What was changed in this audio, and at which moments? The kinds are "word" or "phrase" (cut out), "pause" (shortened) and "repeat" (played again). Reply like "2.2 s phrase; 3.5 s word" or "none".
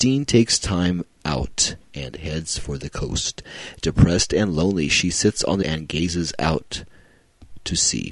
5.6 s word